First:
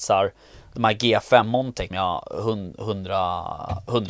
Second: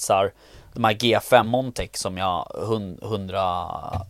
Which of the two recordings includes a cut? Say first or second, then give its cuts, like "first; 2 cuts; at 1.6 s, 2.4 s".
first; 1 cut; at 1.9 s